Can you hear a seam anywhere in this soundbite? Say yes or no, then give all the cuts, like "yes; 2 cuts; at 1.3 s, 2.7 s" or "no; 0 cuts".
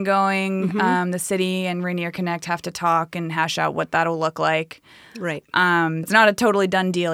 yes; 1 cut; at 6.0 s